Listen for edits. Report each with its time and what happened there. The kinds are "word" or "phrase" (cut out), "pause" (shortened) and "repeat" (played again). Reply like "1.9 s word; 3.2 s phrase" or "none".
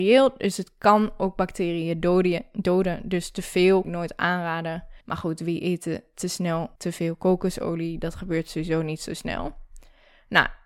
3.8 s phrase; 5.0 s pause; 6.8 s pause